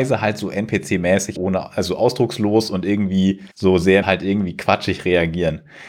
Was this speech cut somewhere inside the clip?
yes; 3 cuts; at 1.4 s, 3.5 s, 4.0 s

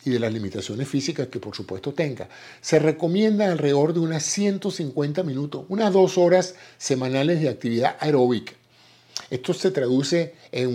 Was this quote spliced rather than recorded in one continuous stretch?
no; 0 cuts

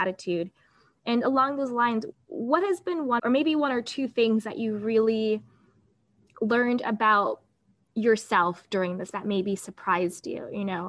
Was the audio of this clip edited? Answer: yes; 3 cuts; at 2.1 s, 3.2 s, 9.1 s

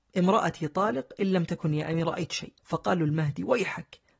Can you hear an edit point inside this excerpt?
yes; 2 cuts; at 2.0 s, 2.6 s

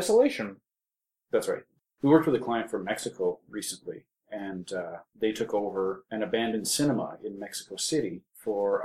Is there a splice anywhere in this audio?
no; 0 cuts

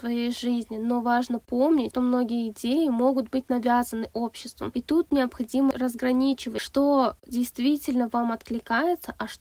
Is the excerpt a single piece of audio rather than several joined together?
yes; 0 cuts

